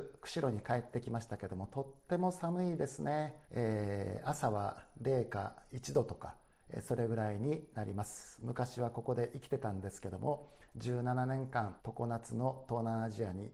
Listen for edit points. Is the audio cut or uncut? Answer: cut